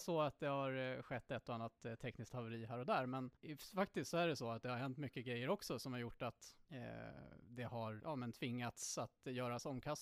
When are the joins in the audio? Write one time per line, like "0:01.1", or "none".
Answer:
0:03.4
0:06.6
0:08.0